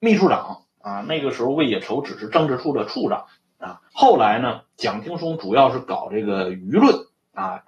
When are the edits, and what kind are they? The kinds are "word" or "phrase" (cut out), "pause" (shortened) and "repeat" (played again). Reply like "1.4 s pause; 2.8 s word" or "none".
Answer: 3.9 s pause